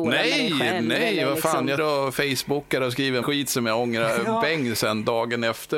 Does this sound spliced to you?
yes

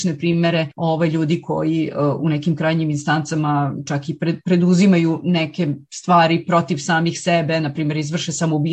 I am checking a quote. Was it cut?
no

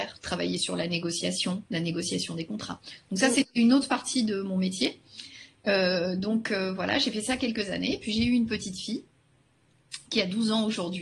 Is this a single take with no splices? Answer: no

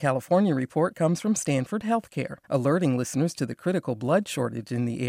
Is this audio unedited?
no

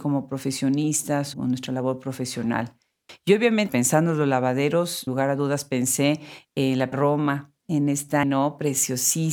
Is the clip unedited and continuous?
no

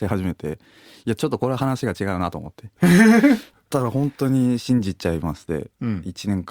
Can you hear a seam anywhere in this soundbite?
no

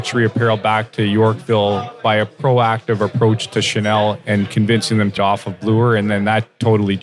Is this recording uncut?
no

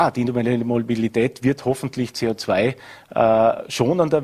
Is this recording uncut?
yes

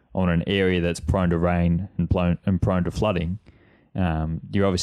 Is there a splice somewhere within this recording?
no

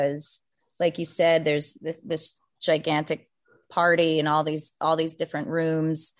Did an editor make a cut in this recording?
no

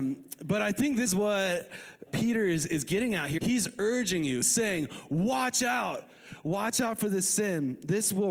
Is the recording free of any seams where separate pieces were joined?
no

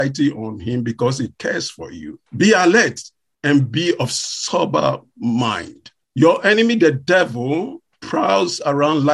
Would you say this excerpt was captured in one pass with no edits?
no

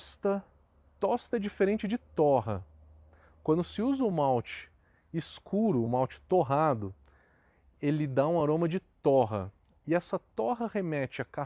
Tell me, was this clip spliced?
no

